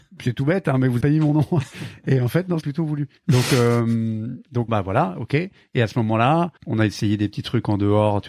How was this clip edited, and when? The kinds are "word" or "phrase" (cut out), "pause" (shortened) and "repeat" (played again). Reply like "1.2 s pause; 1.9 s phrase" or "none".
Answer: 1.0 s word; 2.6 s word; 3.2 s pause; 4.7 s word; 6.6 s pause